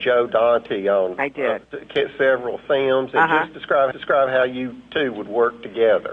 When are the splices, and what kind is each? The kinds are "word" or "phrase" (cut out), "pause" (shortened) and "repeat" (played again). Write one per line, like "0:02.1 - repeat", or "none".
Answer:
0:03.9 - repeat